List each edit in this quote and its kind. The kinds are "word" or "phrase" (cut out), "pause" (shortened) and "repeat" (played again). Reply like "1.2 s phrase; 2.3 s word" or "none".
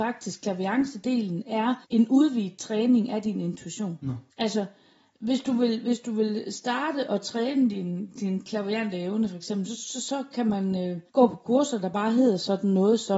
1.8 s pause; 4.3 s pause; 11.1 s pause